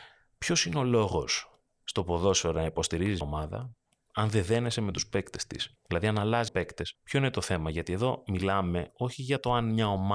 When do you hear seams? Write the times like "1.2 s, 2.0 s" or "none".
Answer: 3.2 s, 5.8 s, 6.5 s, 6.9 s